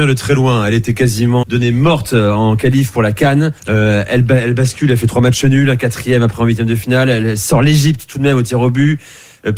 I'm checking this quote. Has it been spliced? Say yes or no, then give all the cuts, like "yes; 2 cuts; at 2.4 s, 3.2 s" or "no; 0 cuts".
yes; 2 cuts; at 1.4 s, 3.6 s